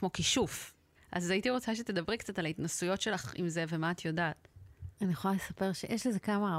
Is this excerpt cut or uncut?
cut